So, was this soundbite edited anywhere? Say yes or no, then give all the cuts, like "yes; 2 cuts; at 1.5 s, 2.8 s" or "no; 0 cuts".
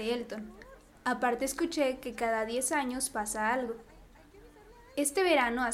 no; 0 cuts